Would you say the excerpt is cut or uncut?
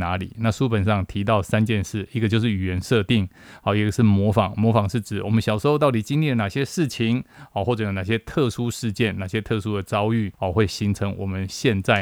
cut